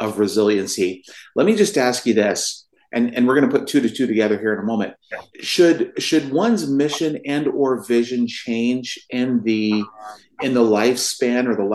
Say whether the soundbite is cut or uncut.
cut